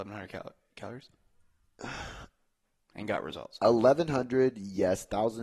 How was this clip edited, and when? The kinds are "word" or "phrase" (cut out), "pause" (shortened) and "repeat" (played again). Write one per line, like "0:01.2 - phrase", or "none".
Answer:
none